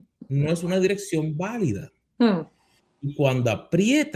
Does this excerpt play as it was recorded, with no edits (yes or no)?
no